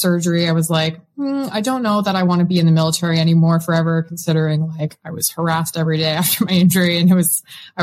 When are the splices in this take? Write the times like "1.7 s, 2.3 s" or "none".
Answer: none